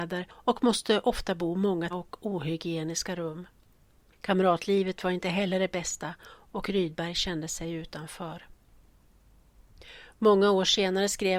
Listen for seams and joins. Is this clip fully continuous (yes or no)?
no